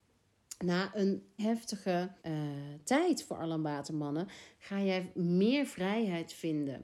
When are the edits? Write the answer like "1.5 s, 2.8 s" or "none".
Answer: 1.4 s, 2.2 s